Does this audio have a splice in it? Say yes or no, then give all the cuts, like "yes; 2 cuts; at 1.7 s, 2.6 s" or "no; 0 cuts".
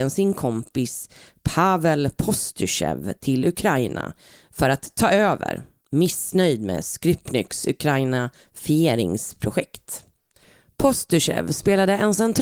no; 0 cuts